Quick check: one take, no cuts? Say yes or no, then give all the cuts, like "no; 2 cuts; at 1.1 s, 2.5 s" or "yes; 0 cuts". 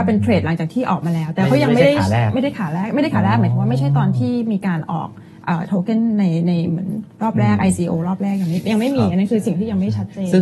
yes; 0 cuts